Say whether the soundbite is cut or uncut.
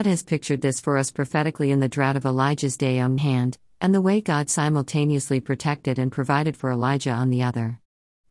cut